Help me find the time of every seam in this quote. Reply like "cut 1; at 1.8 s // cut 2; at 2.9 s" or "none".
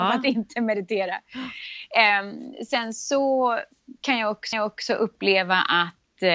cut 1; at 4.5 s